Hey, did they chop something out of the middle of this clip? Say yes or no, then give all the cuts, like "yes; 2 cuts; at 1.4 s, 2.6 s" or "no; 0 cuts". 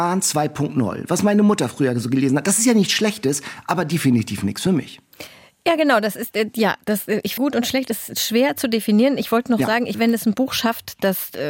yes; 2 cuts; at 7.4 s, 9.9 s